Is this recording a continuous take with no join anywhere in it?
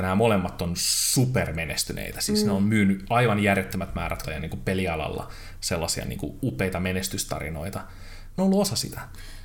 no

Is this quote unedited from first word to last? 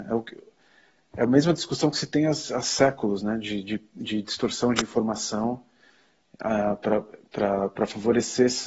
yes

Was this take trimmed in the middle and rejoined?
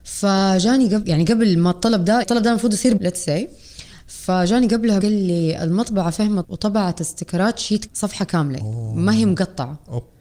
yes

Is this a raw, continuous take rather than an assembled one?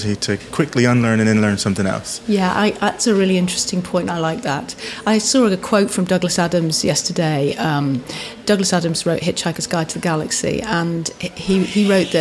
yes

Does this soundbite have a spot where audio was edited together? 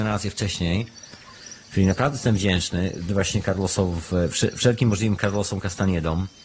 no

